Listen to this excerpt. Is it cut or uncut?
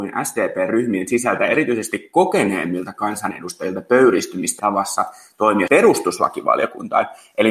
cut